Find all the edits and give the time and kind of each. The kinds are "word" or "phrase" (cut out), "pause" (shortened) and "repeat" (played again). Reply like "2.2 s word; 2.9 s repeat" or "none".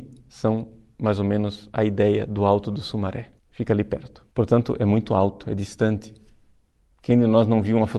3.4 s pause; 4.3 s pause